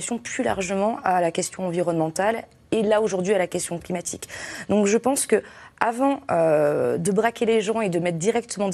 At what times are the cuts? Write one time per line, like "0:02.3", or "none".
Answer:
none